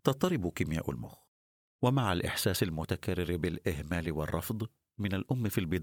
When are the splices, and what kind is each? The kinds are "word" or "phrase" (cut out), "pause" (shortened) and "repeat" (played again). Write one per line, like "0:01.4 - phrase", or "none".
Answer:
none